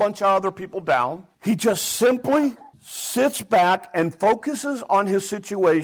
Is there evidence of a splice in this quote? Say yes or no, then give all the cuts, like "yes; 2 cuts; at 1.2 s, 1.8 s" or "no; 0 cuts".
yes; 2 cuts; at 1.3 s, 2.7 s